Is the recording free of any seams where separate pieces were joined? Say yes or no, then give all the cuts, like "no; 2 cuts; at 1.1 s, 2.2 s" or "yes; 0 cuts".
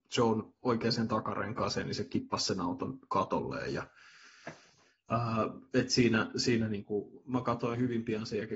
yes; 0 cuts